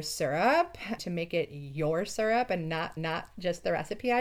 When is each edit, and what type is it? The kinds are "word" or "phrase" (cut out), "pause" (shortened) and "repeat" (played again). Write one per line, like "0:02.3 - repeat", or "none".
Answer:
0:01.0 - word
0:03.0 - repeat